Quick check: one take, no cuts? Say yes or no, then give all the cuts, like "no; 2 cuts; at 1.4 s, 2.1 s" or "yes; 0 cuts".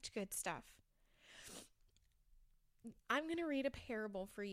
no; 1 cut; at 3.0 s